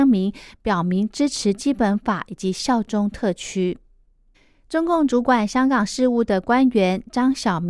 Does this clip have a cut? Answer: yes; 1 cut; at 4.3 s

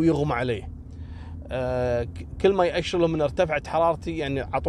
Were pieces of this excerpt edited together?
no; 0 cuts

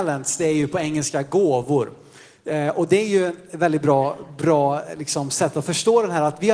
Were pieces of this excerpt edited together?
no; 0 cuts

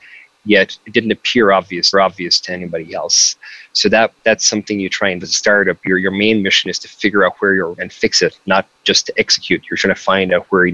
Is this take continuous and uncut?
no; 4 cuts; at 1.9 s, 5.2 s, 7.7 s, 8.7 s

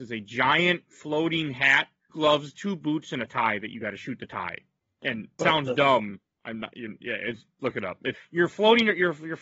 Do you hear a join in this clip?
yes; 3 cuts; at 2.1 s, 5.4 s, 8.1 s

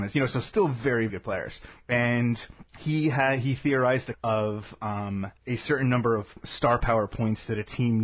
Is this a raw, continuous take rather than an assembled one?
no; 4 cuts; at 1.1 s, 2.7 s, 4.1 s, 5.4 s

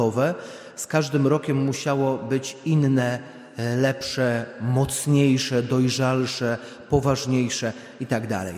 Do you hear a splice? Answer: no; 0 cuts

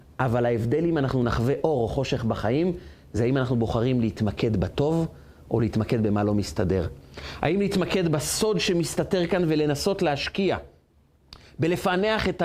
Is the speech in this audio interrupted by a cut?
no; 0 cuts

